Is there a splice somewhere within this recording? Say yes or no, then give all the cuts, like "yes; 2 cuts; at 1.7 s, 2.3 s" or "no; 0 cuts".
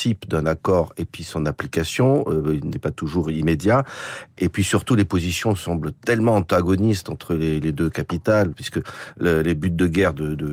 no; 0 cuts